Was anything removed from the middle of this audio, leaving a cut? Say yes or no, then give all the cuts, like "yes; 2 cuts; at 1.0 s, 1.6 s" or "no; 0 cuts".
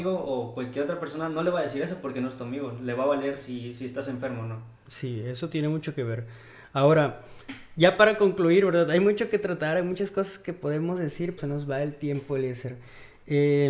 yes; 2 cuts; at 4.8 s, 11.4 s